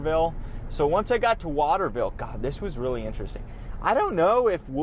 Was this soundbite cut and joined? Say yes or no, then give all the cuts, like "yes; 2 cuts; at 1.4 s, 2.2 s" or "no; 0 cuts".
no; 0 cuts